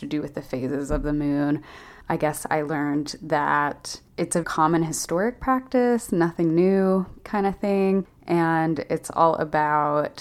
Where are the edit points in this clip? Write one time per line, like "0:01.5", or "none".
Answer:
0:02.0
0:04.1
0:04.4
0:07.2